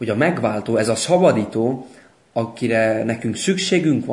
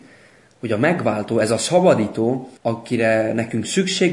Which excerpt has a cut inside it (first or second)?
second